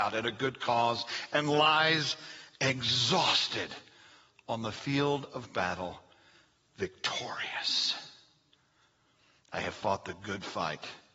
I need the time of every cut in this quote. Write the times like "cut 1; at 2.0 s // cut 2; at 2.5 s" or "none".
none